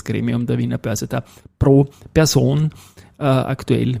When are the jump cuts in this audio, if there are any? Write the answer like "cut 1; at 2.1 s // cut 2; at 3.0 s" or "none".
none